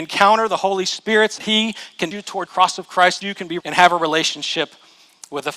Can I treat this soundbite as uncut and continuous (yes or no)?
no